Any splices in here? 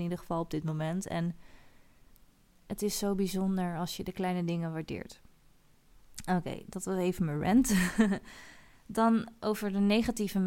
no; 0 cuts

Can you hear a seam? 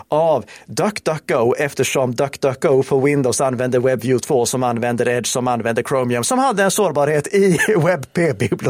no; 0 cuts

